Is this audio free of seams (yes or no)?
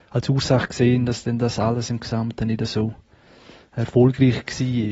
yes